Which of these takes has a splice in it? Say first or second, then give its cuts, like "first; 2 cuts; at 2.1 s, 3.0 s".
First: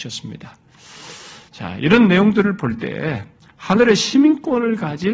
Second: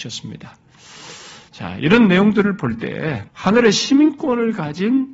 second; 1 cut; at 3.3 s